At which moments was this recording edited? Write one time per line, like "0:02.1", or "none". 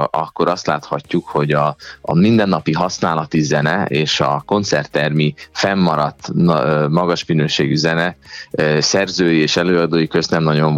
none